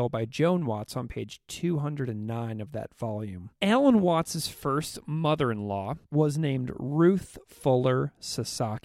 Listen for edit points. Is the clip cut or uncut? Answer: cut